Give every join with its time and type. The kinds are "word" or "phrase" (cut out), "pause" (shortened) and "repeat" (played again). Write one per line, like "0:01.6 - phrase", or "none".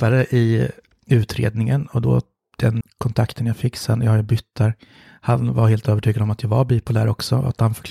0:02.8 - word